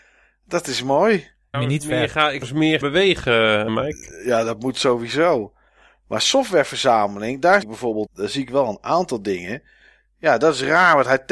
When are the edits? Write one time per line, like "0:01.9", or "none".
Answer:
0:01.5
0:02.4
0:02.8
0:03.7
0:07.6
0:08.1